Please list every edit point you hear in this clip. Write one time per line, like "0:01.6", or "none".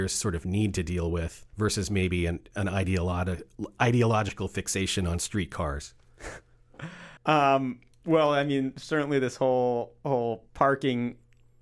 0:01.5
0:07.2
0:10.5